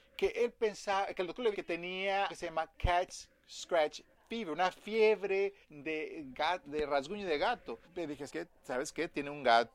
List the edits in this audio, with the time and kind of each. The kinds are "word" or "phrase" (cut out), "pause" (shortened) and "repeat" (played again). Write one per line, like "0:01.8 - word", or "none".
0:01.5 - word
0:02.3 - word
0:05.6 - pause
0:07.8 - pause
0:08.3 - word